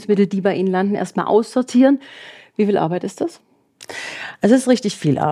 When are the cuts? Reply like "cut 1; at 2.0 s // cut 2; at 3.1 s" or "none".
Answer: none